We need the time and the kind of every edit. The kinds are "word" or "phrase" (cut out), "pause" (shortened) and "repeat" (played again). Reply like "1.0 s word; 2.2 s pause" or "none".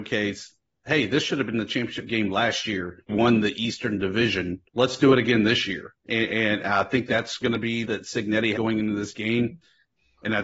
3.1 s phrase; 4.7 s pause; 6.0 s pause; 7.4 s word; 7.8 s phrase; 8.5 s word